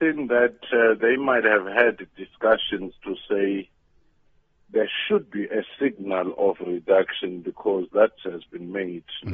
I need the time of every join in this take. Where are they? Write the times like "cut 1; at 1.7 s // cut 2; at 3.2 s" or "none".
cut 1; at 8.2 s